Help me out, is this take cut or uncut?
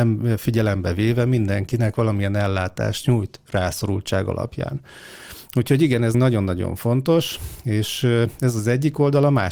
cut